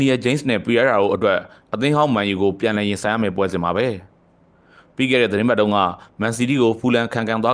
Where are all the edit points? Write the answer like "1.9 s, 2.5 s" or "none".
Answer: none